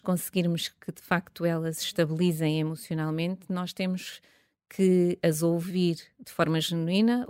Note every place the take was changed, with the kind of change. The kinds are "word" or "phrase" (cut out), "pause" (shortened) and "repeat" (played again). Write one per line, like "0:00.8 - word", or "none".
none

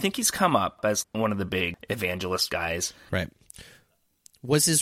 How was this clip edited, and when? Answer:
0:01.0 - word
0:02.5 - word

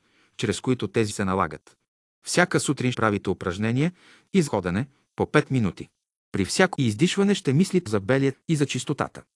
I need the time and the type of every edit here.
0:01.1 - word
0:02.9 - word
0:04.5 - word
0:06.7 - word
0:07.9 - word
0:08.3 - word

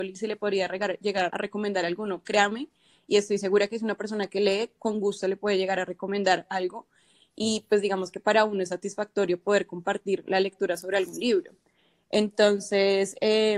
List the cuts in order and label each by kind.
0:01.3 - word

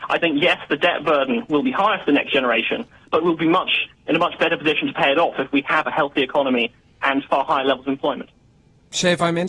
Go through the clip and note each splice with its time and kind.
none

